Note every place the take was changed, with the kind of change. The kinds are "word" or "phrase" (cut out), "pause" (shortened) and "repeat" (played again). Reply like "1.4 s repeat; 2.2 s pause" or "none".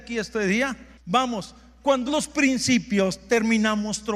2.1 s word